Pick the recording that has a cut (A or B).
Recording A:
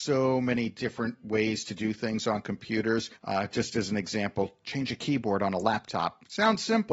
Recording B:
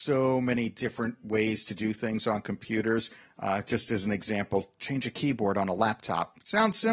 A